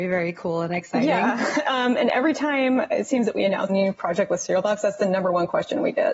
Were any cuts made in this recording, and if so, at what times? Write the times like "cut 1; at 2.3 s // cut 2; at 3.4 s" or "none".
cut 1; at 3.7 s